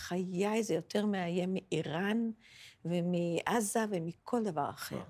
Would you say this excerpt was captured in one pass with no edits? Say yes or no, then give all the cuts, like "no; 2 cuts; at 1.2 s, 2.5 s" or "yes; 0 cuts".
yes; 0 cuts